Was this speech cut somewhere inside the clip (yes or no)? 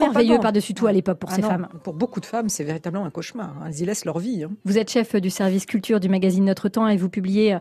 yes